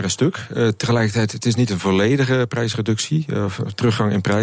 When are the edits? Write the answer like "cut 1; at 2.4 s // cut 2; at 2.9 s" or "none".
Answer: none